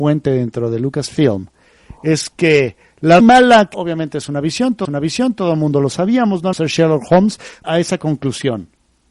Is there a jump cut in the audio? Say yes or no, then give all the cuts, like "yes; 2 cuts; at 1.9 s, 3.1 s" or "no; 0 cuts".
yes; 5 cuts; at 3.2 s, 3.7 s, 4.8 s, 6.5 s, 7.6 s